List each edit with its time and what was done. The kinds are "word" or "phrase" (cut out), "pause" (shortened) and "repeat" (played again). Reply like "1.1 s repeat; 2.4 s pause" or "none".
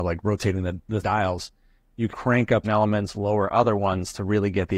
1.0 s word; 2.1 s word; 2.6 s word